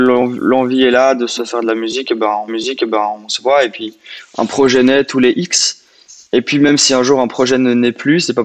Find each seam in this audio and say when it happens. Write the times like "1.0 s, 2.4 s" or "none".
1.4 s, 2.5 s

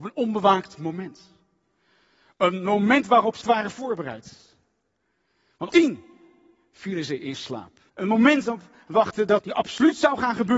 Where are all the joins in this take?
3.4 s, 5.7 s, 7.9 s, 8.5 s, 9.4 s

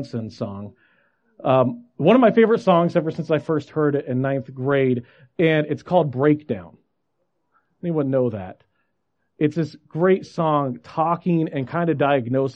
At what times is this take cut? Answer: none

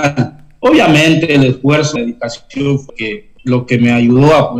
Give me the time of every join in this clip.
2.0 s, 2.9 s, 3.4 s

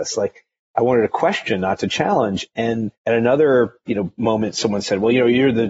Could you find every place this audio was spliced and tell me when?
2.9 s

